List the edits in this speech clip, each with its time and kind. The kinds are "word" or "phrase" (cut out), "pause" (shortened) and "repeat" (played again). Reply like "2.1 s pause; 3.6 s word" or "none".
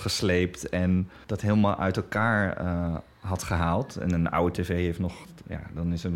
1.2 s pause

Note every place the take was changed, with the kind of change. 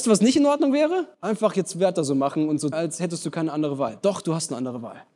1.1 s pause; 2.7 s word

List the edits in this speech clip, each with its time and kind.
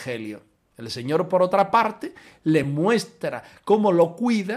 none

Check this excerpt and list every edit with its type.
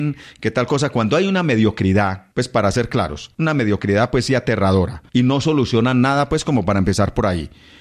2.3 s pause; 3.3 s pause; 5.1 s pause

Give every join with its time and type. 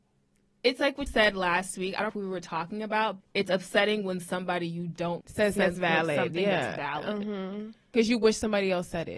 1.1 s word; 2.1 s word; 3.2 s word; 5.2 s word; 5.6 s word

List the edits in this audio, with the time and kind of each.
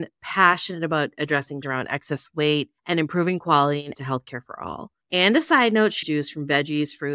1.6 s word; 2.8 s pause; 3.9 s word; 5.0 s pause; 6.0 s phrase

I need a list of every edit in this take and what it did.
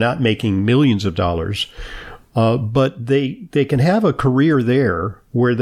none

